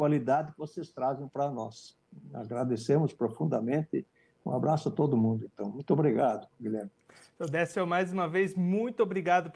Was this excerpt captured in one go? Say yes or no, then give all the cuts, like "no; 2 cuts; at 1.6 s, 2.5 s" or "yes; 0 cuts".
yes; 0 cuts